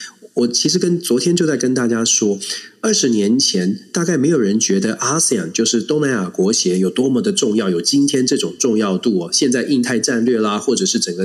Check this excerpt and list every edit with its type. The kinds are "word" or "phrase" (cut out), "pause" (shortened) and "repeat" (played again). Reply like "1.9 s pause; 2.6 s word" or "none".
none